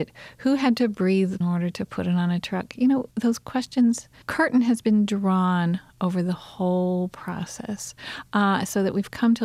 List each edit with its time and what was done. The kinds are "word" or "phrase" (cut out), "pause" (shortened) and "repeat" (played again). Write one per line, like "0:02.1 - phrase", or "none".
0:01.4 - phrase
0:03.1 - word
0:04.2 - phrase